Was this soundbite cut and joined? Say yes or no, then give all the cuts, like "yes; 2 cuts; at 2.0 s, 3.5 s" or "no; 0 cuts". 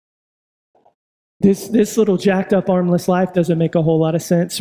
no; 0 cuts